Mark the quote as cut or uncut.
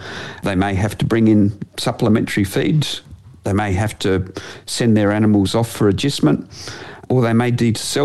uncut